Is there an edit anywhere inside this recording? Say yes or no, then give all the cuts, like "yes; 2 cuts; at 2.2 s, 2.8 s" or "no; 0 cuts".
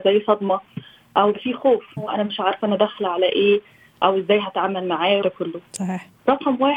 yes; 3 cuts; at 1.3 s, 2.0 s, 5.2 s